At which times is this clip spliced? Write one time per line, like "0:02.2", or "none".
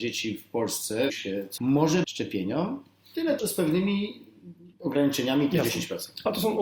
0:01.1
0:01.6
0:02.0
0:03.4
0:04.7